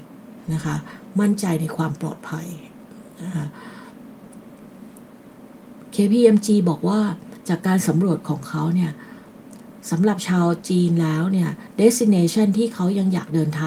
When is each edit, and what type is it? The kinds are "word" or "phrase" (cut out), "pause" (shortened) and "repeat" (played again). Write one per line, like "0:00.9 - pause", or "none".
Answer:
none

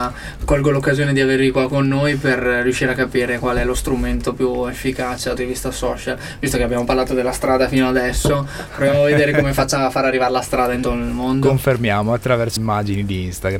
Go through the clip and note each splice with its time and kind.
0:05.4 - phrase
0:10.8 - word
0:12.6 - word

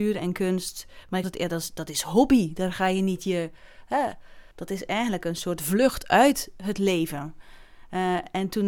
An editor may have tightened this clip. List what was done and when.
0:01.2 - word
0:04.5 - pause

